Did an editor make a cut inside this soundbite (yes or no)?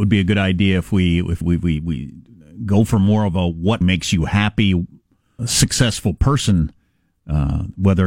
yes